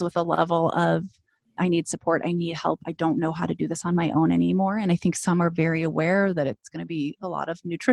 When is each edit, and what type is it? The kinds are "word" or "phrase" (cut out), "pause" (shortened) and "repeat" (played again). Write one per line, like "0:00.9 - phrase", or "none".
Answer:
none